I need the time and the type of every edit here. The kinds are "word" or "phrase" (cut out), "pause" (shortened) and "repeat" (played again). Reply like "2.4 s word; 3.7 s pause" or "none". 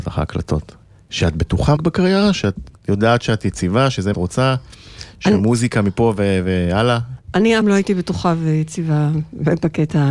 1.8 s word; 2.8 s pause; 4.1 s phrase; 7.6 s phrase